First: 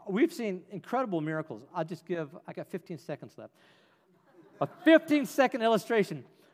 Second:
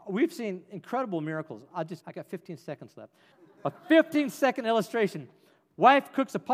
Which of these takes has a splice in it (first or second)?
second